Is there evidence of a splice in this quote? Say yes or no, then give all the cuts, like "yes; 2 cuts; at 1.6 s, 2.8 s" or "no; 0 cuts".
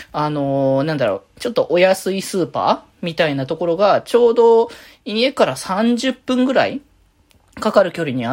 no; 0 cuts